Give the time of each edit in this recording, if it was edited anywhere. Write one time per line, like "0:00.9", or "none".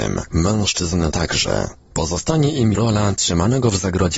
0:01.1
0:02.7